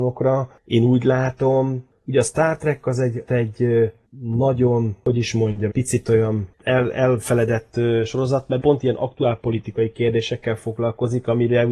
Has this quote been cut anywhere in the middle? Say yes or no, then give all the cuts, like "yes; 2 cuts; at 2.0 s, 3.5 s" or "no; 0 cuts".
yes; 3 cuts; at 3.3 s, 5.7 s, 8.6 s